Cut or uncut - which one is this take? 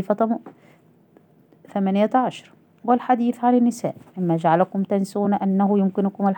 uncut